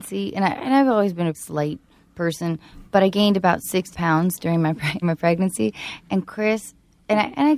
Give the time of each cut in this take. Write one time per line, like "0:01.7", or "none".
0:01.3
0:02.9
0:03.9
0:05.0